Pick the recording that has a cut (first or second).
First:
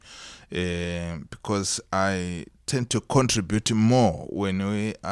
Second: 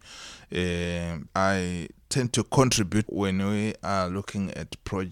second